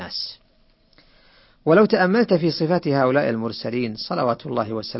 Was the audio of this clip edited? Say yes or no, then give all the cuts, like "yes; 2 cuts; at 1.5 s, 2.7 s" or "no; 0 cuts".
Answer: no; 0 cuts